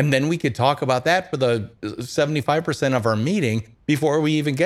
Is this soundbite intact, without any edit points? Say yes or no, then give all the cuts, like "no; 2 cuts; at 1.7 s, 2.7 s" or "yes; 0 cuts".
yes; 0 cuts